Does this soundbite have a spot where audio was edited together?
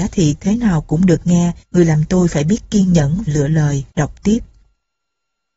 yes; 3 cuts; at 1.6 s, 3.3 s, 3.9 s

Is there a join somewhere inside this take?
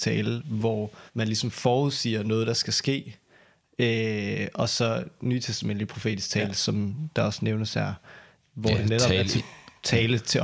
yes; 1 cut; at 1.1 s

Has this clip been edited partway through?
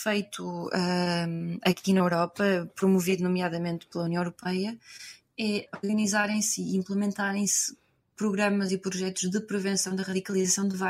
no; 0 cuts

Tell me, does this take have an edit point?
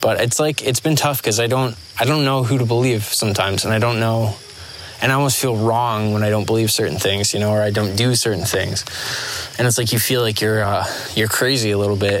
no; 0 cuts

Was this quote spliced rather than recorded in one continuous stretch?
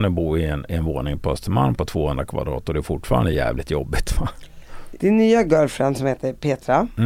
no; 0 cuts

